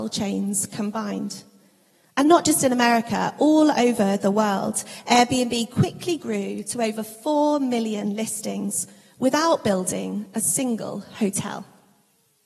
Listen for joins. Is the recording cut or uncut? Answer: uncut